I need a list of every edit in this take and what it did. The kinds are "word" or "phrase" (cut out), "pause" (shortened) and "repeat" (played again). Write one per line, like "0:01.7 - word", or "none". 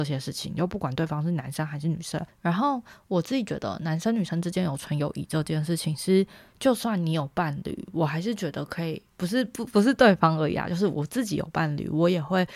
0:09.1 - pause

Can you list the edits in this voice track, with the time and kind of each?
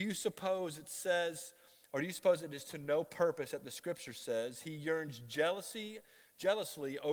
none

